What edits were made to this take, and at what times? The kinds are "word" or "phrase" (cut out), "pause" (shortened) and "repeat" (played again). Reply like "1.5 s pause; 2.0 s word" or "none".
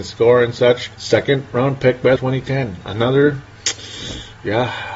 0.9 s pause; 2.2 s phrase